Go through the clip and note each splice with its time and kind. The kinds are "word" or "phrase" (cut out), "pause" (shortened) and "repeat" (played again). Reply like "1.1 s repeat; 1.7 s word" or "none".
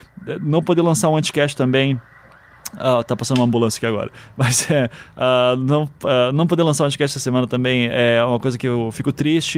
none